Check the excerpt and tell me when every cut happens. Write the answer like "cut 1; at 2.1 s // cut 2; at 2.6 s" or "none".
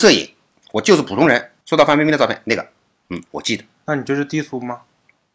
cut 1; at 1.6 s

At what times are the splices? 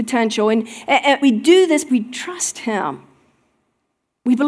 cut 1; at 1.2 s // cut 2; at 1.9 s

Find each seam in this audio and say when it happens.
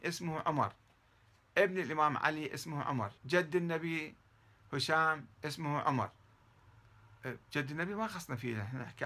cut 1; at 3.2 s // cut 2; at 5.3 s

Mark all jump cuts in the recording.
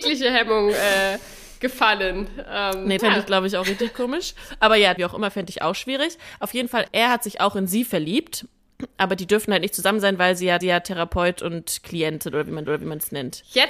cut 1; at 3.0 s // cut 2; at 5.0 s // cut 3; at 6.9 s // cut 4; at 10.6 s // cut 5; at 12.7 s

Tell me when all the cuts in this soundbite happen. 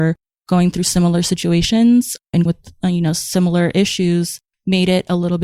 cut 1; at 2.5 s

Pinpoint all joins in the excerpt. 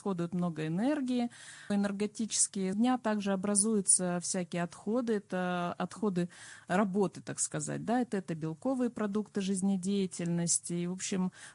cut 1; at 1.7 s // cut 2; at 2.7 s // cut 3; at 8.1 s

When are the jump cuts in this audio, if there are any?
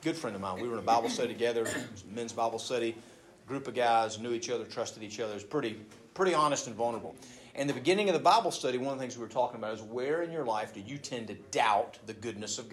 none

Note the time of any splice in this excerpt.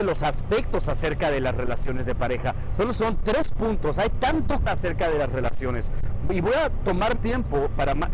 cut 1; at 4.7 s // cut 2; at 7.2 s

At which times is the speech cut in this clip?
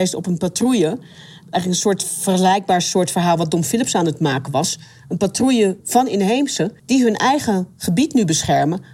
cut 1; at 5.8 s // cut 2; at 6.8 s

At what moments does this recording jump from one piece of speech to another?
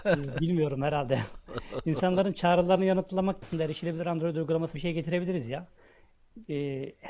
cut 1; at 3.4 s // cut 2; at 4.7 s

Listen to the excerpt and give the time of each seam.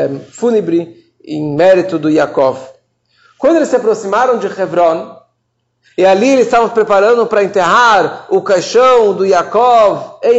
none

